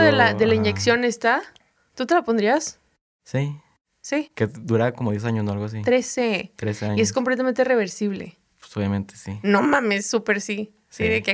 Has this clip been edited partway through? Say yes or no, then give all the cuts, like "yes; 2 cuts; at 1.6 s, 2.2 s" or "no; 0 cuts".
no; 0 cuts